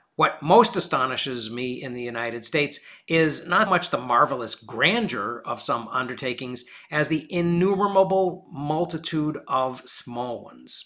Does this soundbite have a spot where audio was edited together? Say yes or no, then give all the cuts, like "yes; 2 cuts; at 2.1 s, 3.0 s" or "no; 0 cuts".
yes; 1 cut; at 3.7 s